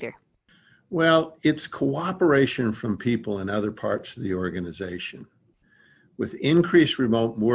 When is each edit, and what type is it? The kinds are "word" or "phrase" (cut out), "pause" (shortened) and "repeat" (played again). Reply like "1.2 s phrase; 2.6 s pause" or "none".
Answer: none